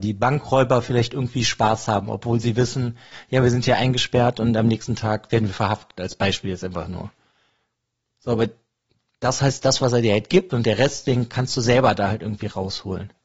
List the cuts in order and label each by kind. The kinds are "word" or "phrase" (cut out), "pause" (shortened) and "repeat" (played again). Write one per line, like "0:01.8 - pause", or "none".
none